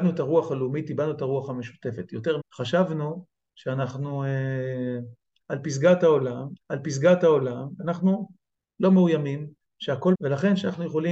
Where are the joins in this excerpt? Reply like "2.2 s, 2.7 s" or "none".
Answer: 2.4 s, 6.6 s, 10.1 s